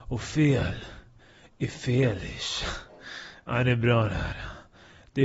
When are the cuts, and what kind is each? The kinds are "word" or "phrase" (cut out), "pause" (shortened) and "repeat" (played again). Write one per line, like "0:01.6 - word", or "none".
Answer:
none